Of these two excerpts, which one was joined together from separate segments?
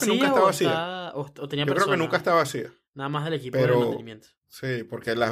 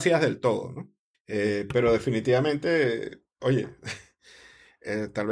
second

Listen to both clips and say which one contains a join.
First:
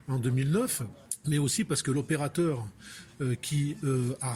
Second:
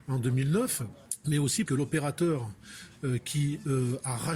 second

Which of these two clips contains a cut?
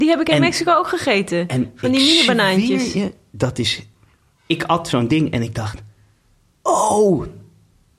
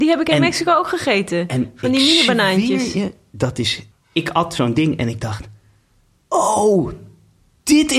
second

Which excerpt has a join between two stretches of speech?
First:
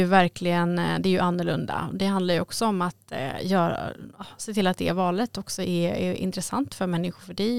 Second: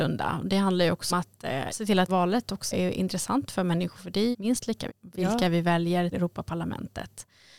second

